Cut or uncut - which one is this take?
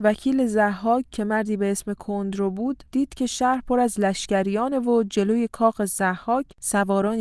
cut